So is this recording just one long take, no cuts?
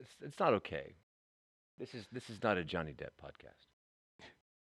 yes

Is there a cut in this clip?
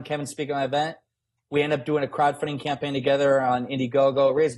no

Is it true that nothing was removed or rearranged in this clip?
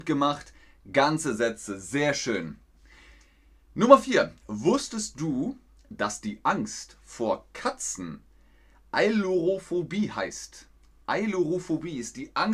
yes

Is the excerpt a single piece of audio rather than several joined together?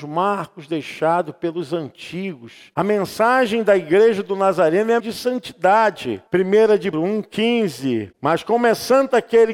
no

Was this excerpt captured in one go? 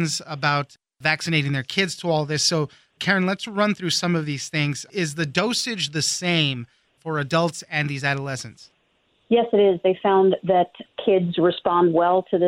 yes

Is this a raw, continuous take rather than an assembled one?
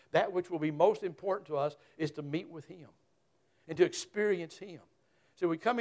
yes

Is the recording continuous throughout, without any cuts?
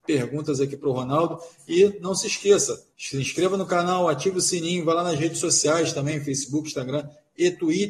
no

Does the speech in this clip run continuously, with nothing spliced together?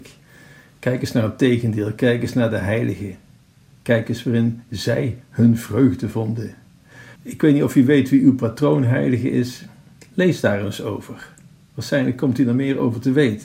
no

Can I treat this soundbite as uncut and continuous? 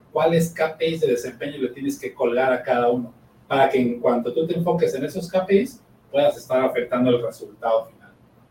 yes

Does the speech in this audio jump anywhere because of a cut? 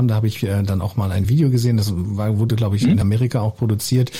no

